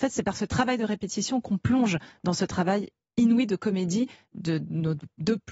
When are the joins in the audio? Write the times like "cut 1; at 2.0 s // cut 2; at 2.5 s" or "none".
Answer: none